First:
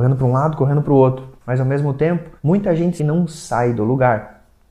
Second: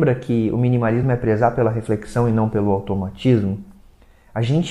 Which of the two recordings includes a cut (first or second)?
first